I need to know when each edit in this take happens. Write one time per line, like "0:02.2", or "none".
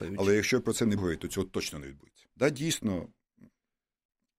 0:01.0
0:02.3

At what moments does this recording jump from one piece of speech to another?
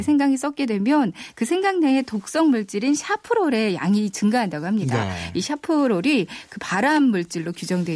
none

